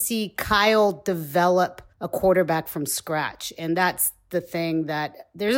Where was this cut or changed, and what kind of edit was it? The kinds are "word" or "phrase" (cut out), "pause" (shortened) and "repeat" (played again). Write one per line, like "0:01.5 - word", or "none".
0:01.9 - pause